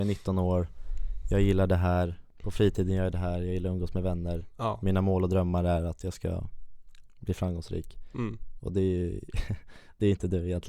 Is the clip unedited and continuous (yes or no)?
yes